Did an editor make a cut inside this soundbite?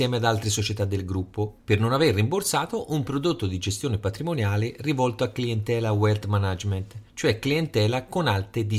yes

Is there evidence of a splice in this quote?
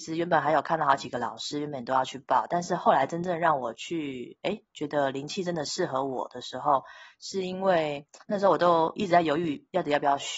yes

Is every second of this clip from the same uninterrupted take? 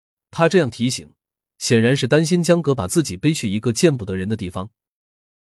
yes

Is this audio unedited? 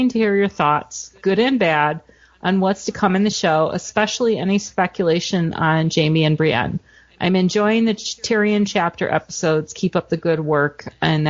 yes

